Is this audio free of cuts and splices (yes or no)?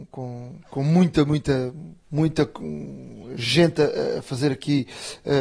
no